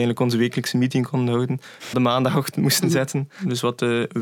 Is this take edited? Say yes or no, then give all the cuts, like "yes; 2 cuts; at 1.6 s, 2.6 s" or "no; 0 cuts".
yes; 1 cut; at 1.9 s